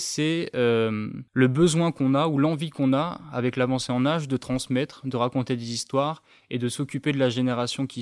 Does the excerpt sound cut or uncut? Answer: cut